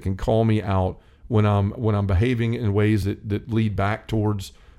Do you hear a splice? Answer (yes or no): no